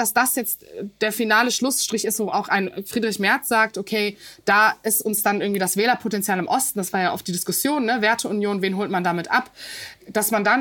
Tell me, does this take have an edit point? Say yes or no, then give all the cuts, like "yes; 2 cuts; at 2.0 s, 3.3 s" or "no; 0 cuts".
no; 0 cuts